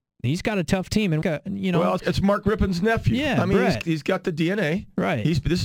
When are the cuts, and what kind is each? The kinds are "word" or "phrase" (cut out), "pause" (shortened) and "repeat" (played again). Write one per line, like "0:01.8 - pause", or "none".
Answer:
0:01.2 - phrase
0:02.0 - word
0:03.8 - word